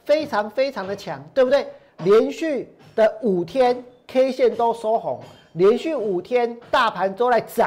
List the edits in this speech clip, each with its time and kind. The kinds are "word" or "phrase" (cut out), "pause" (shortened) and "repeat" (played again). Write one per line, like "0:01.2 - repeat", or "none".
none